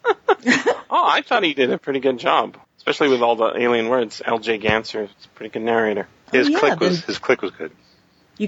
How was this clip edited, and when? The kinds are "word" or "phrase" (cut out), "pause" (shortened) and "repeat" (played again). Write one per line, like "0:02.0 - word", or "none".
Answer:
0:02.6 - pause